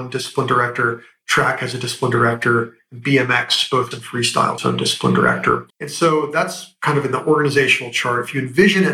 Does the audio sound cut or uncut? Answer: cut